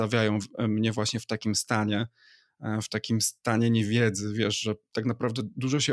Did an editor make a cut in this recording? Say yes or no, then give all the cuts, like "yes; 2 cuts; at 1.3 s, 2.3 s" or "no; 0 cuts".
no; 0 cuts